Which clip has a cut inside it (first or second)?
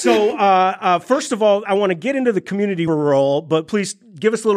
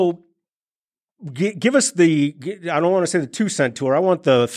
first